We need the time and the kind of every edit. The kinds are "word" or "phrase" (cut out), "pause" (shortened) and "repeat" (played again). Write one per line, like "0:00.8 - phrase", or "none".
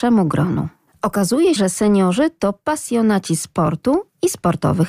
0:01.6 - word